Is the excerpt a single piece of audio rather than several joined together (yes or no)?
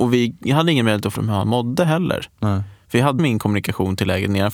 no